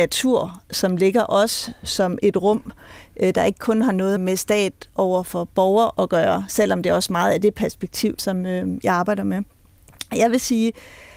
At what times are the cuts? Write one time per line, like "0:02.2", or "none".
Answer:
0:04.2
0:08.2